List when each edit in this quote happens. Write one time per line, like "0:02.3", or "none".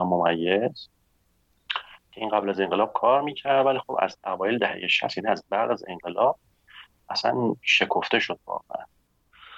none